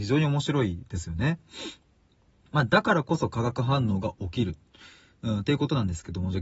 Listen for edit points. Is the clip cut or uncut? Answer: uncut